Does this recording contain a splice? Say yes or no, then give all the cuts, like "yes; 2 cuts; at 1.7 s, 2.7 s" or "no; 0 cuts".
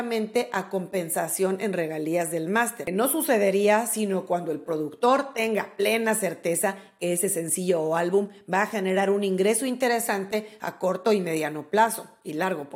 no; 0 cuts